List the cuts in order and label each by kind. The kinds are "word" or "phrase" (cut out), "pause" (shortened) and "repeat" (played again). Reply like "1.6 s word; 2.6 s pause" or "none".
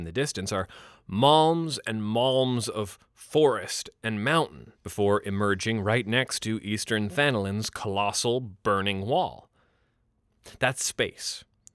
4.8 s pause